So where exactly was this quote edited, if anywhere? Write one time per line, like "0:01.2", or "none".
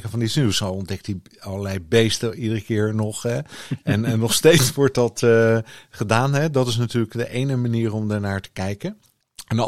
none